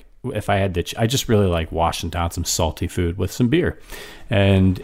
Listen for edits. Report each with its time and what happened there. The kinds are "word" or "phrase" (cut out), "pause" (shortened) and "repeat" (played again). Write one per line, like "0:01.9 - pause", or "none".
none